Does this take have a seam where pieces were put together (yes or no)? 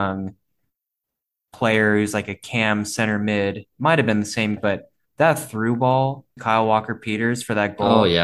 yes